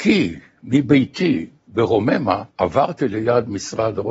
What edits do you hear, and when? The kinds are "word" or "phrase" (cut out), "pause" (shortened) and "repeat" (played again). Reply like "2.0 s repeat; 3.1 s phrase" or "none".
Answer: 1.6 s phrase; 2.5 s pause